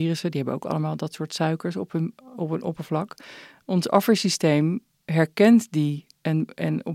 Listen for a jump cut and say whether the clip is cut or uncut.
uncut